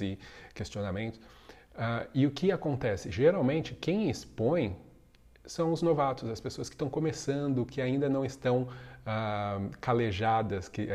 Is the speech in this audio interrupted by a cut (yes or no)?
no